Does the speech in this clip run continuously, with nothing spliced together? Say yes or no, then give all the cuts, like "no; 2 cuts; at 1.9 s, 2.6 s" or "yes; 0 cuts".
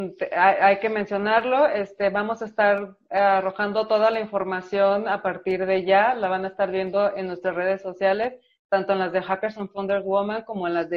yes; 0 cuts